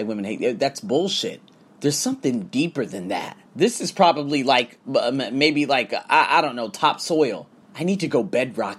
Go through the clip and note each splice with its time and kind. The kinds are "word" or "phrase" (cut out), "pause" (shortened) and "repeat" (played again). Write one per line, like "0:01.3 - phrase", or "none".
0:01.7 - pause
0:03.5 - pause
0:07.6 - pause